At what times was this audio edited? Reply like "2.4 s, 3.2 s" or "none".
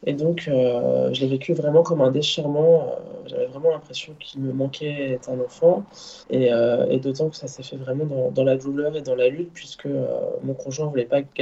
6.2 s